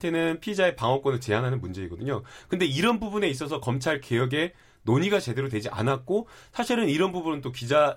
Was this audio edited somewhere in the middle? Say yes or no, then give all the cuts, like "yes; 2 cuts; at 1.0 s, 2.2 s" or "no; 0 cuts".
no; 0 cuts